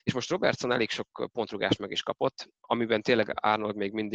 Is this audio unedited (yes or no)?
no